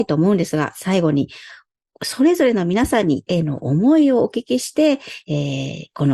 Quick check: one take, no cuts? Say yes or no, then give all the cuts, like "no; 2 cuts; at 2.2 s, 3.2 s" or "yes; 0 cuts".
no; 1 cut; at 3.3 s